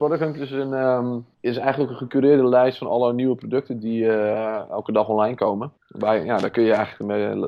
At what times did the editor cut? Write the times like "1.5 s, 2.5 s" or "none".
1.3 s, 5.8 s